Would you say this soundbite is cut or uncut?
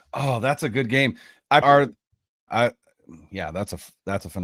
cut